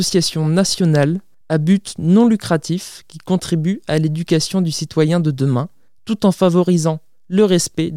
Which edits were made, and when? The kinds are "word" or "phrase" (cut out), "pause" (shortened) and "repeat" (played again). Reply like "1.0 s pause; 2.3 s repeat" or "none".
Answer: none